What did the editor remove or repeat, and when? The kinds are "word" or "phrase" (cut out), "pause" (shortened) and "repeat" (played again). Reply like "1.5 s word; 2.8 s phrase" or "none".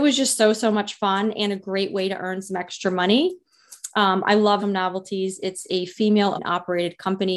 4.6 s word; 6.4 s word